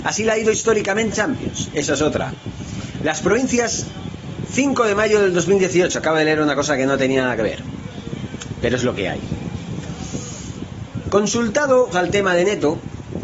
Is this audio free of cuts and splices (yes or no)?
no